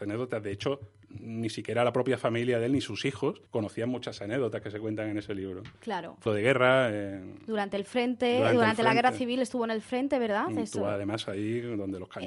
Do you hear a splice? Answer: yes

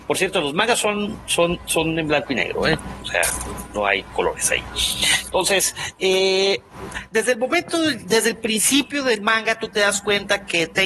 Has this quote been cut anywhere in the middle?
no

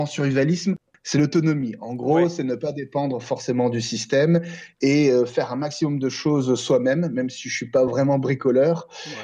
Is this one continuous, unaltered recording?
yes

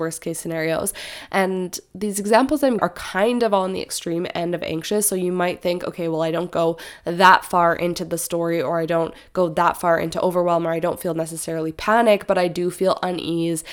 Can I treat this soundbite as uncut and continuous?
no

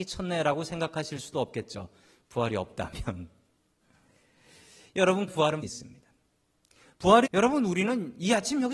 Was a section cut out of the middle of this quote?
yes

